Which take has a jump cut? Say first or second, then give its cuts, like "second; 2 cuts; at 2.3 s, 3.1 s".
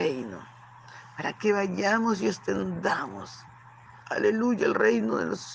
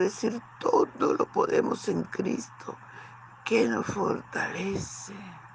first; 1 cut; at 4.0 s